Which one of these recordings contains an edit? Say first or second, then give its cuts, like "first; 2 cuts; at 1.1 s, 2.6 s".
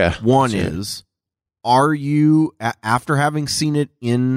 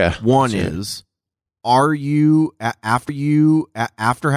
second; 1 cut; at 3.1 s